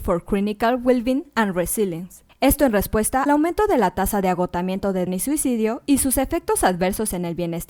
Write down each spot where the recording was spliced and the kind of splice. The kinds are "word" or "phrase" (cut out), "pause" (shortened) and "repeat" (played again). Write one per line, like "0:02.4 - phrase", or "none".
0:03.3 - word
0:05.1 - word